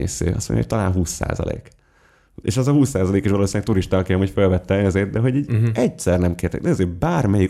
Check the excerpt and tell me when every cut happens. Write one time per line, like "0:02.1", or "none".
none